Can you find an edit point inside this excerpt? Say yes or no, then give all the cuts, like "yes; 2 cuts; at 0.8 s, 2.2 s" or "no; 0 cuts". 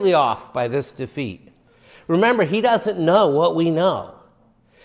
no; 0 cuts